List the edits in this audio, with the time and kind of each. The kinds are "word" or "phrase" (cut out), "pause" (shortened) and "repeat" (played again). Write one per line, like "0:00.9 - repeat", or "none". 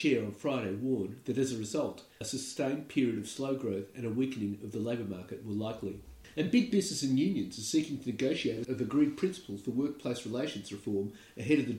0:08.6 - word